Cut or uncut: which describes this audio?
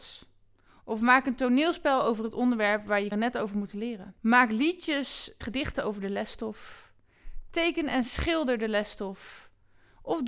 cut